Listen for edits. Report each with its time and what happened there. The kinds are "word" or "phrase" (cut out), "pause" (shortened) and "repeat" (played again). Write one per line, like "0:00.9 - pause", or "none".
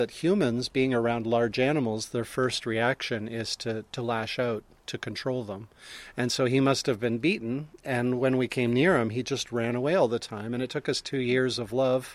none